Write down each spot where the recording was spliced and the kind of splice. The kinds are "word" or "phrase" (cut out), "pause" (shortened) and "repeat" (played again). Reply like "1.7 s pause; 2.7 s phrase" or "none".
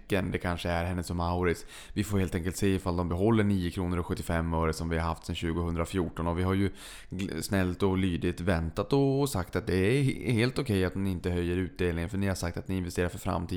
none